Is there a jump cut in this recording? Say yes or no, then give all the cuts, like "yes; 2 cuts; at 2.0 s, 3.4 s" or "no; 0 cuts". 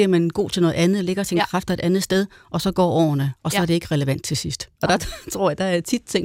no; 0 cuts